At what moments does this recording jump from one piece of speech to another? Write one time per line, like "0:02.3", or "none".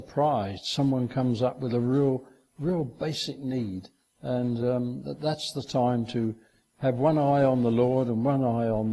none